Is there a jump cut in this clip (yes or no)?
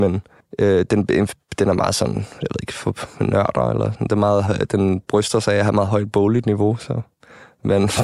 no